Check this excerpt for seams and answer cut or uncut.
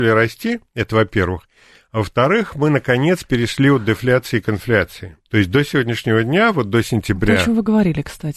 cut